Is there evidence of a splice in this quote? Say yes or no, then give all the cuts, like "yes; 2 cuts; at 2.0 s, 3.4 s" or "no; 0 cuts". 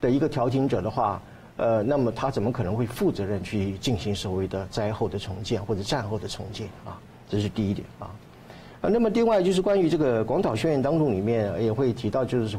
no; 0 cuts